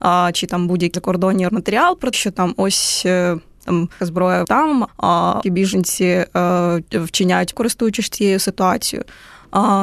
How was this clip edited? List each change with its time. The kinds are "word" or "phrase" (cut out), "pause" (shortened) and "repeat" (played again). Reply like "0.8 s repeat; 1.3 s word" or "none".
0.9 s word; 1.5 s word; 2.1 s word; 4.0 s word; 4.4 s word; 4.9 s word; 5.4 s word; 7.5 s word